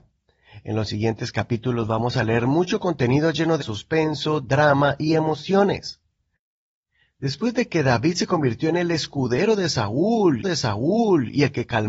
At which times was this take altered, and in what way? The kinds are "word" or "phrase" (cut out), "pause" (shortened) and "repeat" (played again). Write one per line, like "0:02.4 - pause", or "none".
0:03.6 - word
0:10.4 - repeat

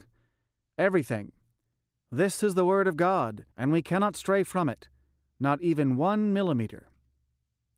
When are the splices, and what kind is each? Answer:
0:03.5 - pause

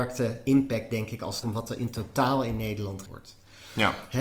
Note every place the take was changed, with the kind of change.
0:01.4 - word
0:03.0 - word

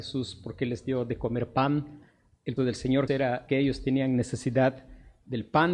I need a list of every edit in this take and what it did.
0:02.6 - word
0:03.1 - word
0:03.5 - word

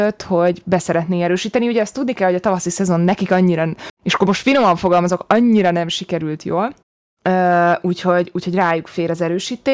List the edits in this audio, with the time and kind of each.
0:03.9 - pause
0:06.8 - pause

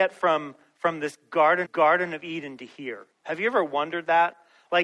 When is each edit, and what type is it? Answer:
0:01.6 - repeat
0:03.1 - pause

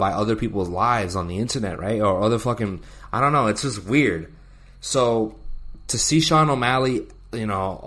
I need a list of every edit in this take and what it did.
none

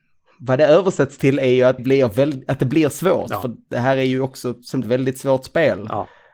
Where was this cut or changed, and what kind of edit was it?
0:01.8 - word
0:04.8 - phrase

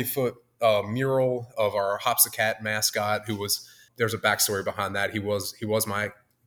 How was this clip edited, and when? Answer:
0:03.9 - word

